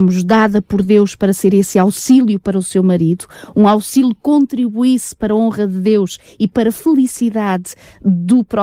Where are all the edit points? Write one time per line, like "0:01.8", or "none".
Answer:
none